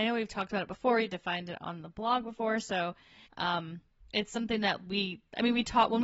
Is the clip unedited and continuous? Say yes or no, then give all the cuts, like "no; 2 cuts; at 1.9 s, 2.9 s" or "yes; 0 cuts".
no; 1 cut; at 3.3 s